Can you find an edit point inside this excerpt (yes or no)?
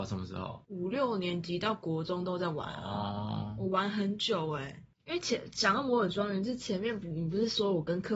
no